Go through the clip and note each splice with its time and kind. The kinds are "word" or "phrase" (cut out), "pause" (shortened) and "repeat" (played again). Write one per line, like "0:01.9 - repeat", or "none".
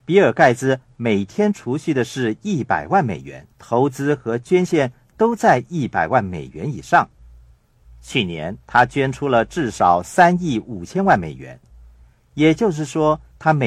0:03.5 - pause
0:08.6 - pause